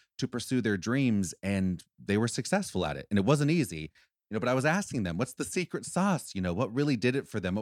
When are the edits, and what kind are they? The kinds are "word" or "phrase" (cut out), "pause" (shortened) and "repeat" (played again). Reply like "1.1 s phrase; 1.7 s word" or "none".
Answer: none